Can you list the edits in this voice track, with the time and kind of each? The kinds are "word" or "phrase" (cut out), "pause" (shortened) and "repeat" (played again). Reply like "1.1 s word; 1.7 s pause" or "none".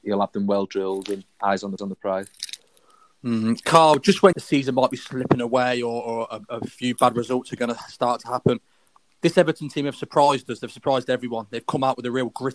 1.8 s repeat; 4.3 s phrase